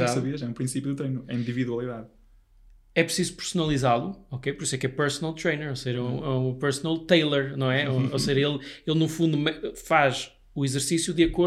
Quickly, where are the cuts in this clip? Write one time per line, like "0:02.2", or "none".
none